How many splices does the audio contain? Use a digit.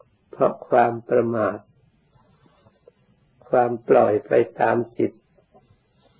0